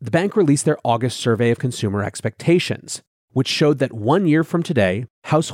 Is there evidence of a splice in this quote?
no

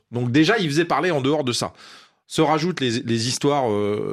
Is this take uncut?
yes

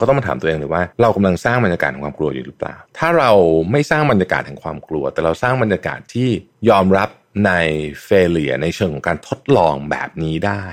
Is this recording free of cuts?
no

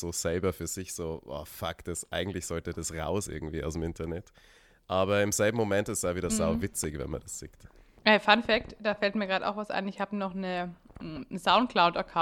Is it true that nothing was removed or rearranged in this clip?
yes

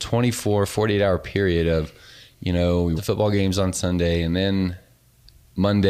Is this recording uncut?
no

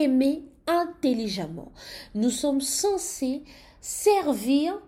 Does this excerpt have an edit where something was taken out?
no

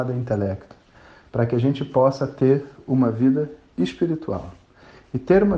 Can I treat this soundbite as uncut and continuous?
yes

